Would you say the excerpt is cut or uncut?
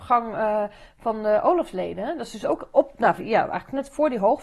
cut